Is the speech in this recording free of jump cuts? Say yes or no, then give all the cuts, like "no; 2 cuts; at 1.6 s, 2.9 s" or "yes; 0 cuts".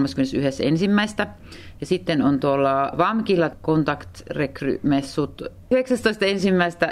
yes; 0 cuts